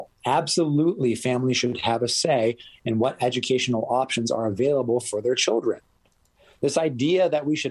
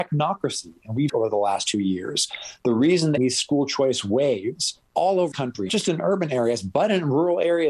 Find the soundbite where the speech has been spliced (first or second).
second